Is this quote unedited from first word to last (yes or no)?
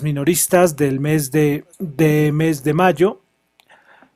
no